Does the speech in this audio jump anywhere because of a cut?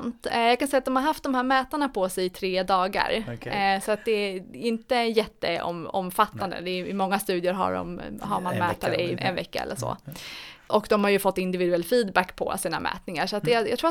yes; 1 cut; at 9.2 s

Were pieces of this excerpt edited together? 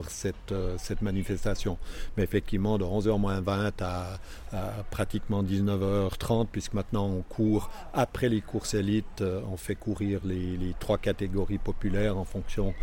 no; 0 cuts

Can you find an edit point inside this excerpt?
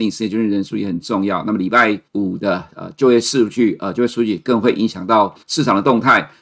yes; 2 cuts; at 2.1 s, 5.4 s

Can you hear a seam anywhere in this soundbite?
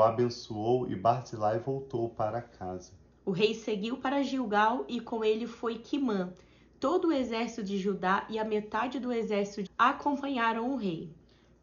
yes; 1 cut; at 9.7 s

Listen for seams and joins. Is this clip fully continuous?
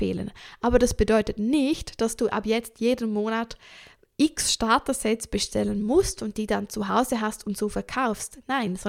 yes; 0 cuts

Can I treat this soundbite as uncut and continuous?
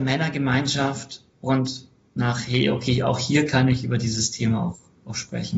yes; 0 cuts

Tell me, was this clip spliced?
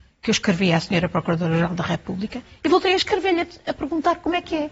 no; 0 cuts

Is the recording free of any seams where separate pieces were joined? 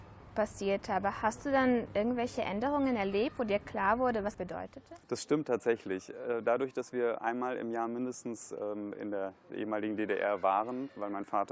no; 2 cuts; at 4.3 s, 5.0 s

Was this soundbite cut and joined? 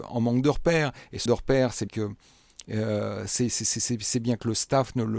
yes; 2 cuts; at 1.3 s, 1.9 s

